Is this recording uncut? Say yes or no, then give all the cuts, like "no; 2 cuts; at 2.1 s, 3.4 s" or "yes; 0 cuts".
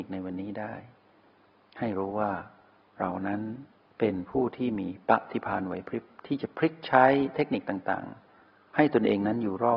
yes; 0 cuts